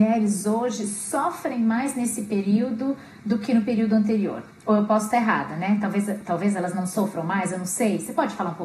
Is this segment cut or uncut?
uncut